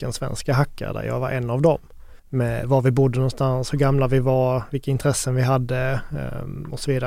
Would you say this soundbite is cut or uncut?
cut